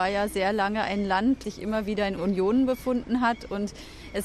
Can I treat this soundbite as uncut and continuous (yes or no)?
no